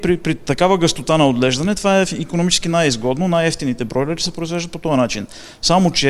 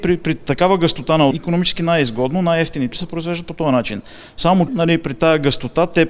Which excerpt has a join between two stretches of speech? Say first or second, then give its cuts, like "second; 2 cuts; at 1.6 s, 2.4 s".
second; 3 cuts; at 1.3 s, 2.9 s, 4.7 s